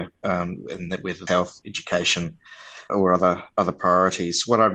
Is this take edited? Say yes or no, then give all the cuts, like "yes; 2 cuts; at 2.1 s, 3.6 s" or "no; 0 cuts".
yes; 2 cuts; at 1.3 s, 2.9 s